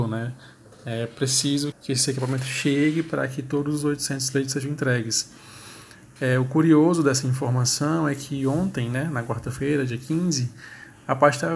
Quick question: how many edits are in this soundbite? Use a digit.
1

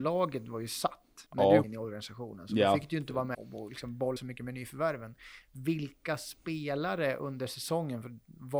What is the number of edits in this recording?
4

